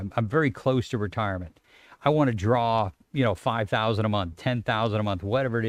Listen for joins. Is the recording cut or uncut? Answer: uncut